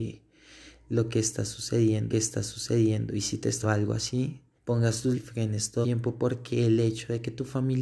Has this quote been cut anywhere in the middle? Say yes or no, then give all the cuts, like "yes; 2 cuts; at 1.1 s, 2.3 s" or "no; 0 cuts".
yes; 5 cuts; at 2.1 s, 3.6 s, 4.6 s, 5.1 s, 5.8 s